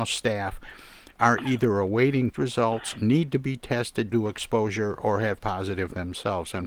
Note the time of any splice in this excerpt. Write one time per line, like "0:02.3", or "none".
0:02.3
0:04.1
0:05.4